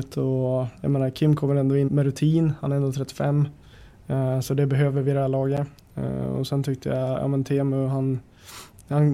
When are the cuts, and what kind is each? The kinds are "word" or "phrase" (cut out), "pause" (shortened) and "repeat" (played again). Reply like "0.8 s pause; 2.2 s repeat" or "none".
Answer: 1.9 s word